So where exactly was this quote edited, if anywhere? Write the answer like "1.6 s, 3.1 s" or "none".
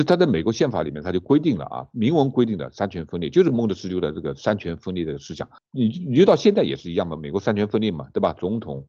5.6 s